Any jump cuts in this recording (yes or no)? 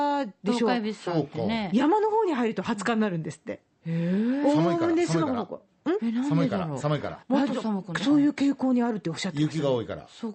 yes